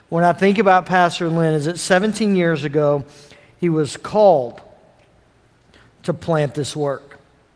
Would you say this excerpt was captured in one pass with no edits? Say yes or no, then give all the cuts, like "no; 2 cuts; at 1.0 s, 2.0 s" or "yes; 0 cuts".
yes; 0 cuts